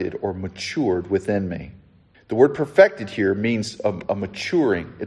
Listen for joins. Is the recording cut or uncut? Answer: cut